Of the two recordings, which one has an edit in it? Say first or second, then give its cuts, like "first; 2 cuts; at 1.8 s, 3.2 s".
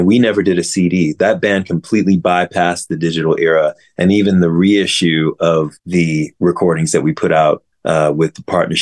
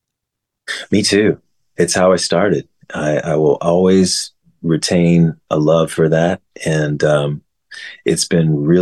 first; 2 cuts; at 5.8 s, 7.7 s